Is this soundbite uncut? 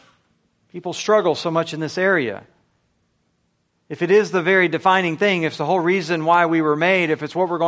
yes; 0 cuts

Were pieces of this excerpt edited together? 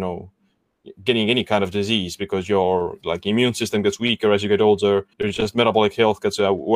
yes; 1 cut; at 5.1 s

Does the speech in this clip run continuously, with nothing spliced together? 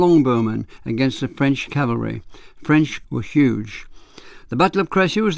no; 2 cuts; at 1.7 s, 3.0 s

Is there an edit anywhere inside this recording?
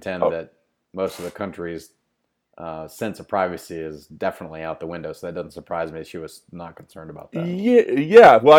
no; 0 cuts

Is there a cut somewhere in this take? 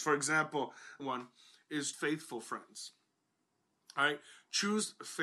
yes; 2 cuts; at 1.0 s, 1.9 s

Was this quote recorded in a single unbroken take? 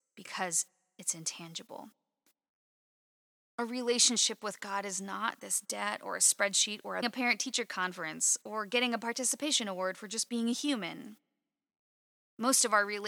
no; 1 cut; at 7.0 s

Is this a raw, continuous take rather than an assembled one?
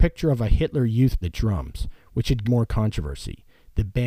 no; 2 cuts; at 1.2 s, 2.4 s

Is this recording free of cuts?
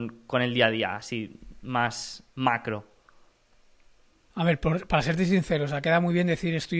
yes; 0 cuts

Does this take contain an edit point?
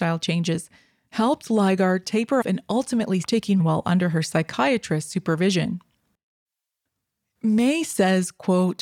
yes; 3 cuts; at 2.4 s, 3.2 s, 3.6 s

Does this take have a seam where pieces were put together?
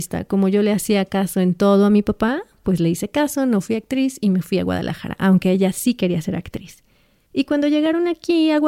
no; 0 cuts

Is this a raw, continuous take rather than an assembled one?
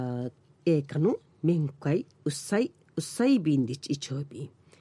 yes; 0 cuts

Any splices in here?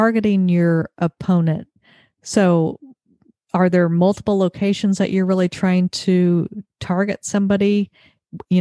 no; 0 cuts

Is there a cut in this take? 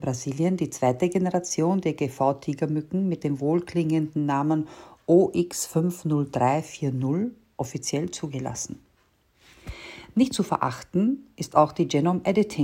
no; 0 cuts

